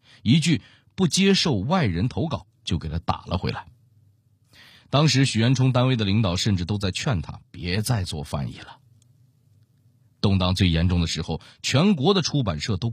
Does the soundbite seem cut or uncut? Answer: uncut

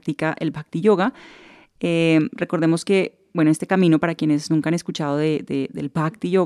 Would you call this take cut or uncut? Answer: uncut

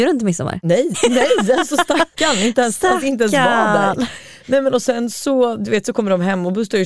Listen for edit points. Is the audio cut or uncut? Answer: cut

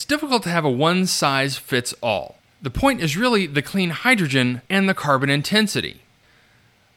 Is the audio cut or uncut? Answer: cut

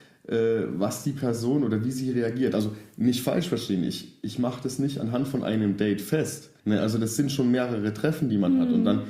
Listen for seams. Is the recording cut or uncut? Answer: cut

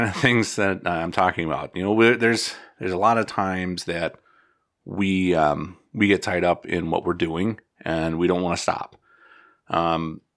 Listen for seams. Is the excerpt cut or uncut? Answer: uncut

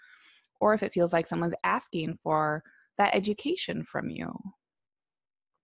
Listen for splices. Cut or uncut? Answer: uncut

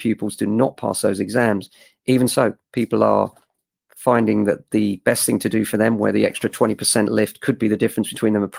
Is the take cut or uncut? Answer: uncut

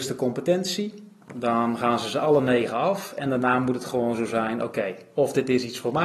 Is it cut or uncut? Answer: uncut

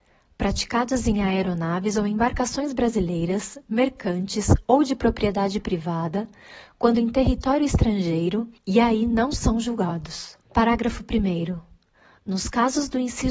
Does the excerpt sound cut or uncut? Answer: cut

